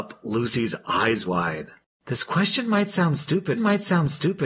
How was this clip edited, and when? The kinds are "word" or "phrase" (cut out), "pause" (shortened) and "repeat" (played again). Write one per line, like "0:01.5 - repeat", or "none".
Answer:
0:01.2 - word
0:03.5 - repeat

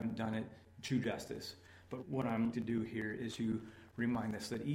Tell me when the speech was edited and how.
0:02.0 - word
0:02.5 - word
0:03.3 - word

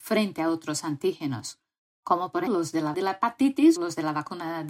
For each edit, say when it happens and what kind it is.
0:02.5 - word
0:02.9 - word
0:03.8 - word

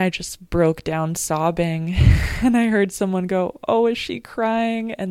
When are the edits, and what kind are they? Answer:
none

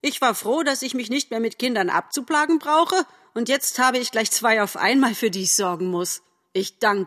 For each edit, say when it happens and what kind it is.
none

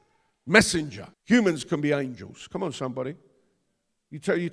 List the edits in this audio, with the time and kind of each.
0:01.1 - pause

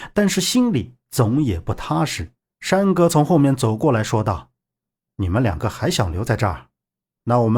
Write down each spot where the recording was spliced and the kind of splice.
0:02.4 - pause
0:04.9 - pause

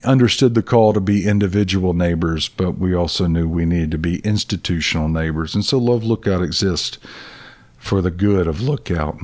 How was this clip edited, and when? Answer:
none

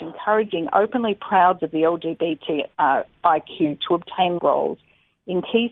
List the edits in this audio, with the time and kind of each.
0:01.6 - word
0:02.7 - pause
0:03.8 - word
0:04.4 - word

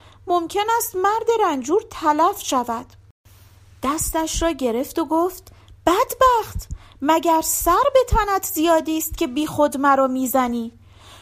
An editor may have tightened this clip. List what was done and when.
none

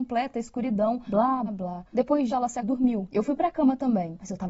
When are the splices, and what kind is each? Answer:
0:01.5 - word
0:02.3 - word
0:02.6 - word

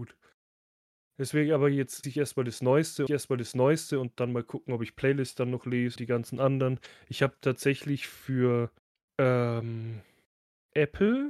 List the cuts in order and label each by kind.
0:02.0 - word
0:03.1 - repeat
0:06.0 - word
0:08.8 - pause

